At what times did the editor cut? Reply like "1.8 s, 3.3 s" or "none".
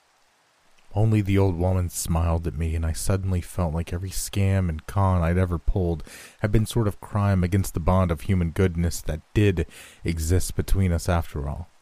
6.7 s